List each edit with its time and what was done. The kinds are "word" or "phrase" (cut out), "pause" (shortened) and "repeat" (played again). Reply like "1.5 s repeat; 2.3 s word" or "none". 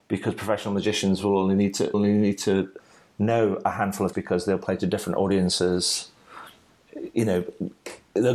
1.9 s word; 4.1 s word